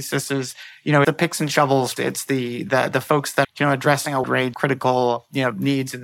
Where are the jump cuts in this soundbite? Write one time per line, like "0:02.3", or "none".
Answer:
0:01.0
0:02.0
0:03.4
0:04.2
0:04.5